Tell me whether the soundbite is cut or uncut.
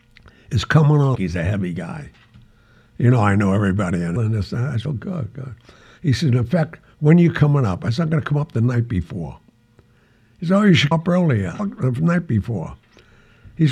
cut